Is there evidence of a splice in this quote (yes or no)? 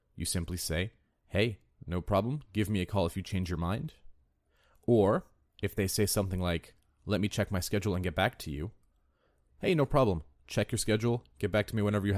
no